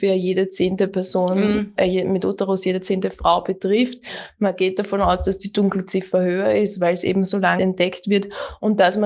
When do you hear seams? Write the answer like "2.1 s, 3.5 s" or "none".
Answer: 7.6 s